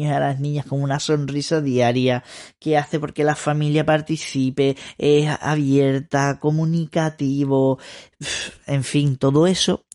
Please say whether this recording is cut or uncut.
uncut